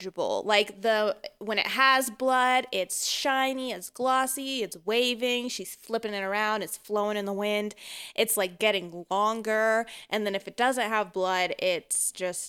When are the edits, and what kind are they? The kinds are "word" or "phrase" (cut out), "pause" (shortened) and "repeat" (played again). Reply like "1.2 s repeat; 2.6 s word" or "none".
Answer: none